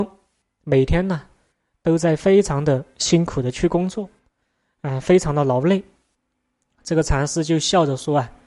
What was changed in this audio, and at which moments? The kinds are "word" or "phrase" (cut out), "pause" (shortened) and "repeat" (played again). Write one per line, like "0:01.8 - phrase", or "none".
none